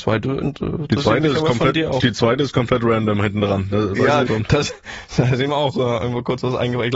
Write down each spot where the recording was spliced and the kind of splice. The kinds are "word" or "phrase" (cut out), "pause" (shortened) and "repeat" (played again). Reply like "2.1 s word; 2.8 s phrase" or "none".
4.3 s phrase; 5.1 s word